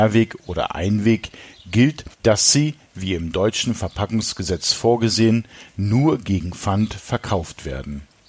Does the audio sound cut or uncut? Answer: cut